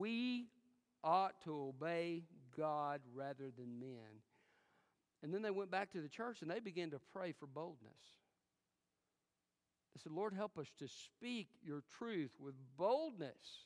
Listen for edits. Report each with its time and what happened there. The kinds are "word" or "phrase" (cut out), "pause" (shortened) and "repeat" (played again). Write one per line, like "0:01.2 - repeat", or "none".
none